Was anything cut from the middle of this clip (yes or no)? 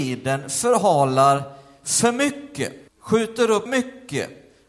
yes